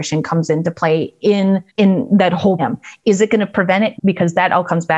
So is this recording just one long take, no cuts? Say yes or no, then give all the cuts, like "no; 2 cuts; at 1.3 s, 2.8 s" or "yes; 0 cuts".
no; 3 cuts; at 1.7 s, 2.6 s, 4.0 s